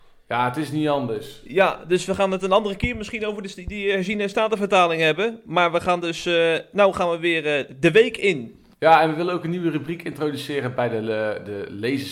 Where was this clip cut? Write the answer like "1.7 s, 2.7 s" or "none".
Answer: 8.7 s